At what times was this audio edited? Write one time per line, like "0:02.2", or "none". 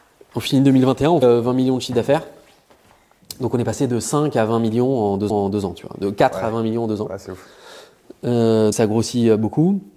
0:01.2
0:05.3
0:08.7